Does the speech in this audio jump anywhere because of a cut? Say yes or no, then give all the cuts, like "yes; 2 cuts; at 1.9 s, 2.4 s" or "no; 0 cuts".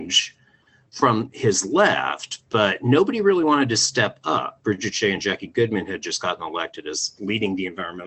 no; 0 cuts